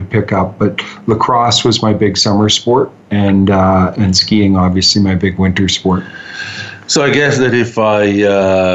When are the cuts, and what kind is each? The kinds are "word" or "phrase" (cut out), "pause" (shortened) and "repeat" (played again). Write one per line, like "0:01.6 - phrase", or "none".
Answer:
none